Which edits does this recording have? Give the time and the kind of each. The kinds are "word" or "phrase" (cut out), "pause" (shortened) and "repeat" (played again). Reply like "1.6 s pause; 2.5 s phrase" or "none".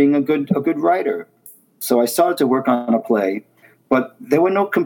none